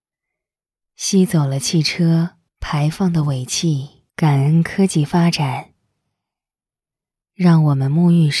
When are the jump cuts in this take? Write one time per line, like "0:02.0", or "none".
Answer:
0:02.5
0:04.1